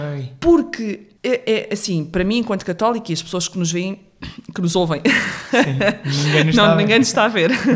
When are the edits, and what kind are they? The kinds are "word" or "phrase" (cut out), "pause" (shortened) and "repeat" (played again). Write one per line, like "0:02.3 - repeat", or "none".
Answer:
0:01.2 - pause